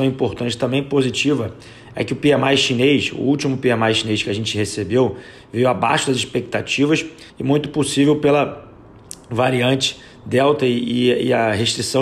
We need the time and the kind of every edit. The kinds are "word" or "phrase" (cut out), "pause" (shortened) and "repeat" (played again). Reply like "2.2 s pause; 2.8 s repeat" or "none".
7.3 s pause